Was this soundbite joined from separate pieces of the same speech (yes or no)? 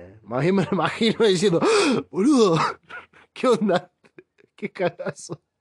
no